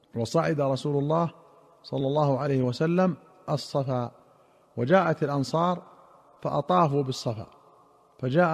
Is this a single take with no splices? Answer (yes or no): yes